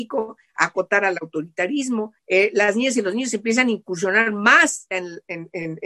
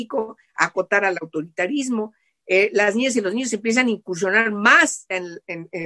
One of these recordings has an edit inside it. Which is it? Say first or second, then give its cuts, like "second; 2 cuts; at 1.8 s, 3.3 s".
first; 1 cut; at 2.2 s